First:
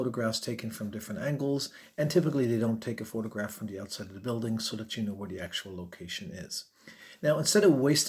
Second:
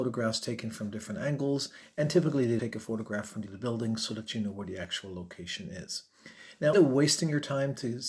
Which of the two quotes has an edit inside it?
second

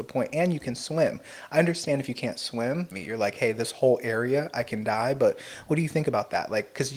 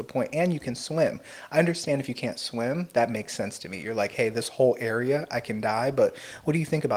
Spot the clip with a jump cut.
first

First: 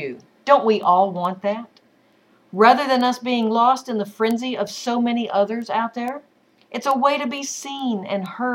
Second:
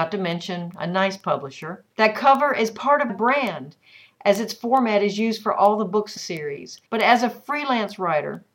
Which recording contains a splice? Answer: second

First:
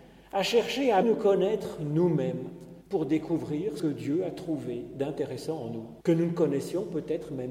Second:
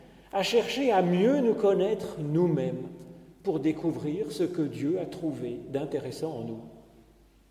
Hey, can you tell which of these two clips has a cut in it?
first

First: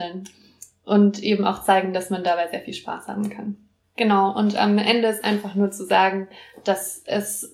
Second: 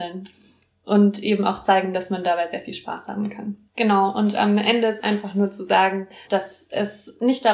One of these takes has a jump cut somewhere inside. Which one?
second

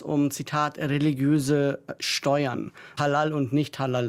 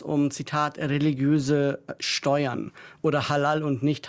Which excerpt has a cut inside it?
first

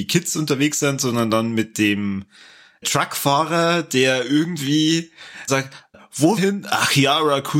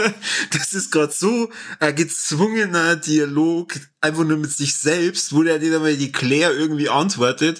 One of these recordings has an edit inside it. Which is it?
first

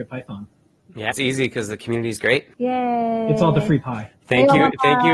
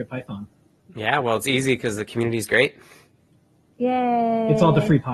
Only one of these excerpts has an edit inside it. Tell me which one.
first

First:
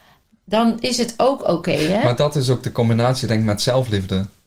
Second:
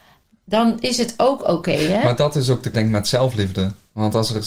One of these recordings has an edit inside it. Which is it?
second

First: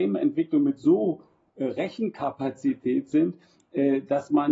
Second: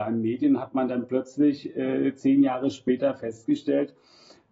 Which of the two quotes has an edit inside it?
first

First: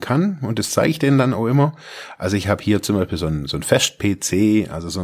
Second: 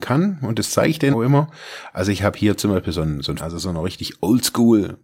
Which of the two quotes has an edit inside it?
second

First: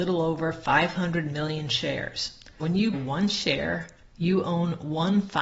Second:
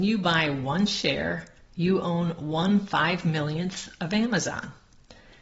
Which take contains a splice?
first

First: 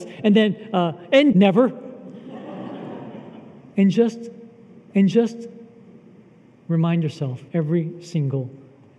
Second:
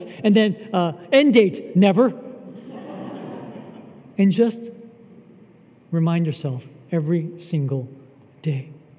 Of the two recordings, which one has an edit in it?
first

